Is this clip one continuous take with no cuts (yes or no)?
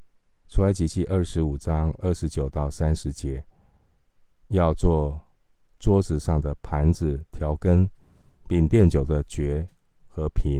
yes